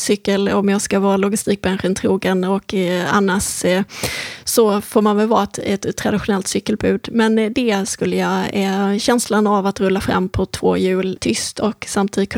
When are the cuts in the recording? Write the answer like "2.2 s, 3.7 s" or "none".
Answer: 11.2 s